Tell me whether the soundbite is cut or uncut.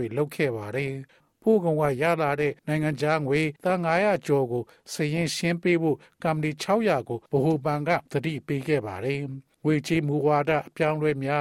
cut